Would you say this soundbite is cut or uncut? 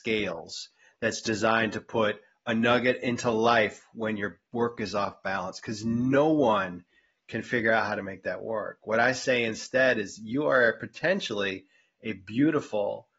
uncut